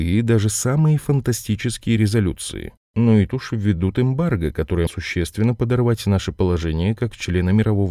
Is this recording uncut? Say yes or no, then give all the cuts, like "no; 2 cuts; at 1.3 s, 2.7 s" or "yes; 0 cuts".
no; 3 cuts; at 2.0 s, 3.3 s, 4.9 s